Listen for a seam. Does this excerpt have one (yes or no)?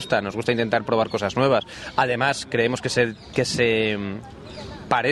no